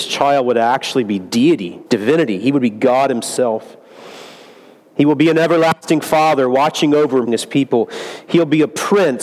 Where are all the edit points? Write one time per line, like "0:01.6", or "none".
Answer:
0:01.9
0:07.3

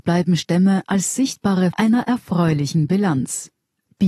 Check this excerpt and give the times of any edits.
0:01.7

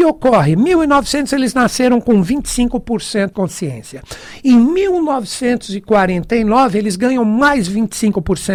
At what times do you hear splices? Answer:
0:03.3

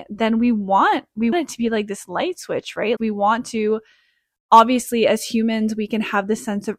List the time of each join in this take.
0:01.3
0:03.0

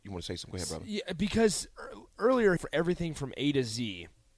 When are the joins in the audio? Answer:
0:02.6

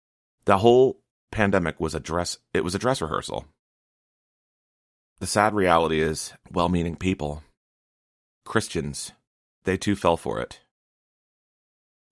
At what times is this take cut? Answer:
0:06.4
0:09.4

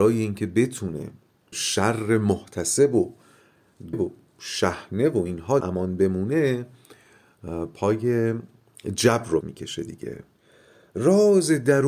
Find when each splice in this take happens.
0:01.5
0:03.9
0:05.6
0:09.4

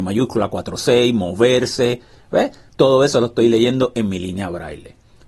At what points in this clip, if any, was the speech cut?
none

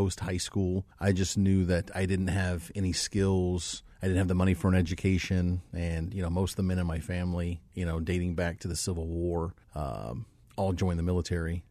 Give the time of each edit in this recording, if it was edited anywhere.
0:00.9
0:03.9
0:09.6

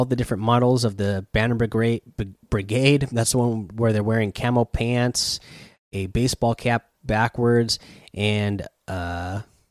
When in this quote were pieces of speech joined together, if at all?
none

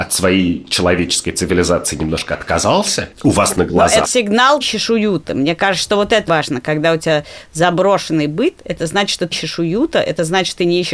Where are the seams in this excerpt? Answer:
0:03.1
0:04.0
0:04.6
0:06.3
0:09.3

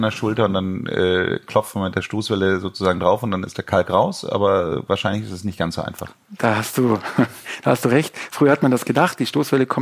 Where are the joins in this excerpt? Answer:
none

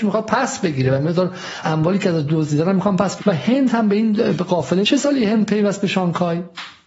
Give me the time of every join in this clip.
0:01.6
0:03.2
0:04.8

